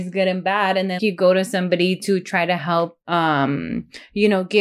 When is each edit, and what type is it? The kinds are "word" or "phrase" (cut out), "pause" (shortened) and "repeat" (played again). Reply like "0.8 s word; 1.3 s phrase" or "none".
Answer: 1.0 s word; 3.0 s pause

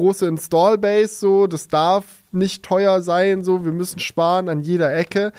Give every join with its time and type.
none

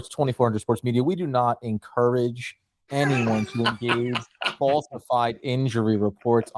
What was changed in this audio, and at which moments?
4.6 s word

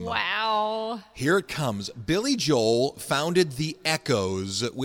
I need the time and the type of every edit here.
none

